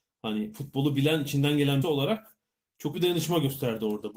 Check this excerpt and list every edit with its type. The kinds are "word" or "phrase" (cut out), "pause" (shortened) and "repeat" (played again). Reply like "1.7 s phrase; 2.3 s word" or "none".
1.8 s word; 2.9 s word

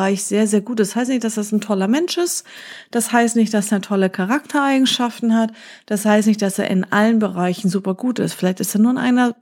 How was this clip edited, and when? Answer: none

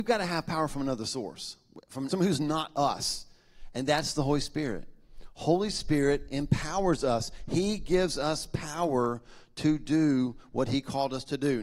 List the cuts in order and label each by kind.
2.1 s phrase

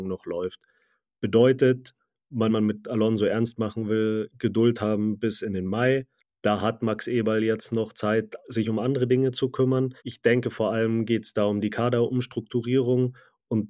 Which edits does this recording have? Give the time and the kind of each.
2.5 s phrase; 6.2 s pause; 10.0 s pause

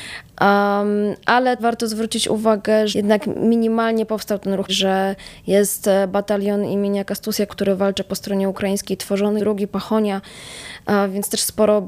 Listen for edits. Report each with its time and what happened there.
1.6 s word; 2.9 s word; 4.7 s word; 7.5 s word; 9.4 s word

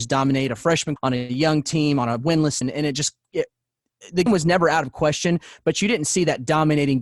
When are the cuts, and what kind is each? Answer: 1.0 s word; 2.6 s word; 4.3 s word

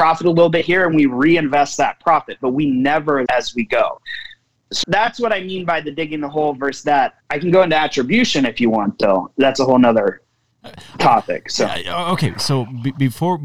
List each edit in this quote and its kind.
3.3 s word; 4.8 s word; 7.2 s pause

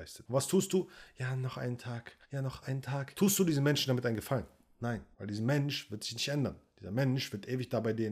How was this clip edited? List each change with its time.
2.2 s pause; 2.6 s phrase; 5.1 s pause

